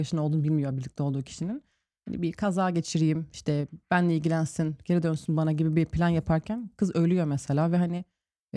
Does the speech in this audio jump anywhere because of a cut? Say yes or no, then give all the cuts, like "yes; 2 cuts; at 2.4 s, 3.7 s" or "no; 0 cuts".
no; 0 cuts